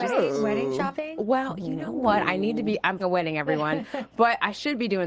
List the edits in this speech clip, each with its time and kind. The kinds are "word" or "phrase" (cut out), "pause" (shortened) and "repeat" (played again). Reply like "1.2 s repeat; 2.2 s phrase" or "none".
3.0 s word